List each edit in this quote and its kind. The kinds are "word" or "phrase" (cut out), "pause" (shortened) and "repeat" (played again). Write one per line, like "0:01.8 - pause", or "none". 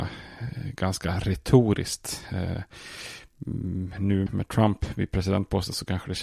0:04.3 - word